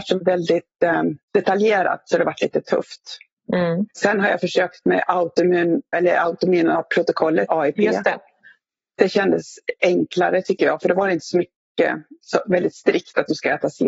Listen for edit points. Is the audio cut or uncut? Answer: cut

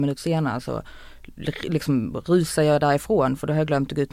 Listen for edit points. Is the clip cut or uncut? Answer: uncut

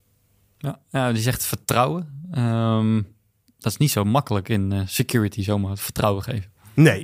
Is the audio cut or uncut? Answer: uncut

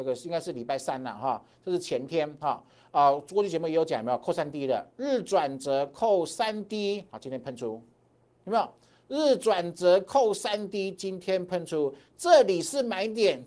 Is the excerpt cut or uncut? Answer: uncut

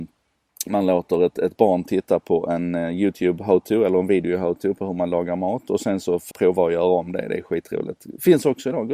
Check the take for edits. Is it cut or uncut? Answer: cut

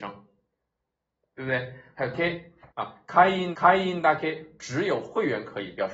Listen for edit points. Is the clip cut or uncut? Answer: cut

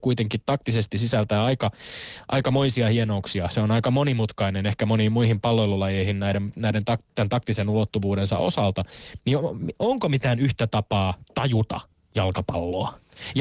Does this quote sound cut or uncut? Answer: uncut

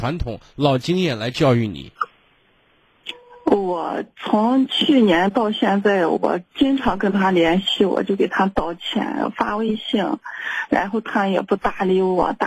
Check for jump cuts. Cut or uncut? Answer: uncut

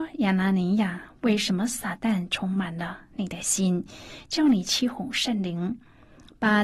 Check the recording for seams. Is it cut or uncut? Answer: uncut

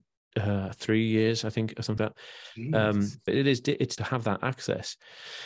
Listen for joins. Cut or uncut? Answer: cut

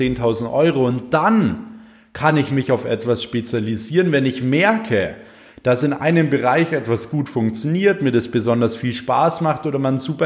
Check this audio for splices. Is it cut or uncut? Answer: uncut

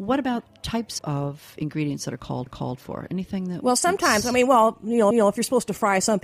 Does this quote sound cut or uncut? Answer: cut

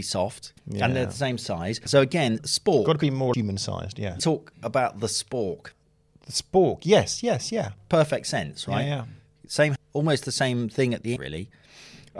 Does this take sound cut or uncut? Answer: cut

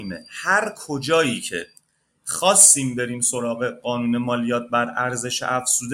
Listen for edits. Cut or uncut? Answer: uncut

